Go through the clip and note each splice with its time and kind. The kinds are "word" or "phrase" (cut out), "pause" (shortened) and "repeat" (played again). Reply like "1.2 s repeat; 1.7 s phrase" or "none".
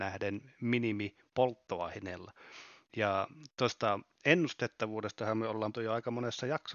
5.7 s word